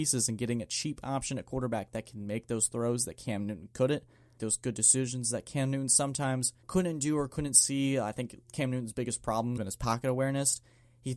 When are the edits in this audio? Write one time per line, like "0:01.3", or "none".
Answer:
0:04.4
0:06.6
0:09.6